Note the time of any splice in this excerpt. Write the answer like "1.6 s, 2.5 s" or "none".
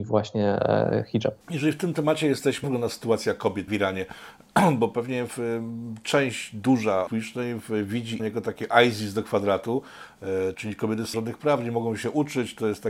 1.4 s, 2.6 s, 3.7 s, 7.1 s, 8.2 s, 11.1 s